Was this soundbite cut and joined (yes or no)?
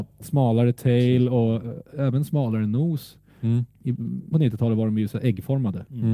yes